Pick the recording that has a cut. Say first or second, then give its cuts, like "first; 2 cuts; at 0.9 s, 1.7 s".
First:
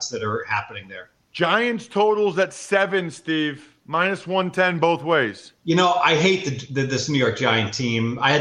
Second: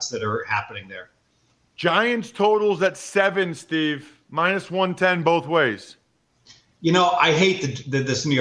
first; 2 cuts; at 1.2 s, 5.6 s